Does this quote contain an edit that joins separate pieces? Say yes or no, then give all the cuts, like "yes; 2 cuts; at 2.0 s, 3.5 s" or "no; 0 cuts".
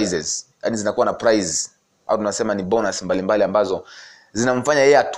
no; 0 cuts